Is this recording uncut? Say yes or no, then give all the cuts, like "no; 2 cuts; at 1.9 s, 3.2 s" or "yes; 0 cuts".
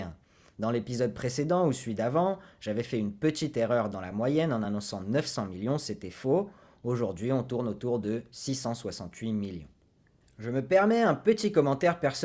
yes; 0 cuts